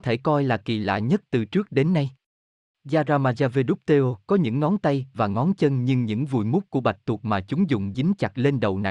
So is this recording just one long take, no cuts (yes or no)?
no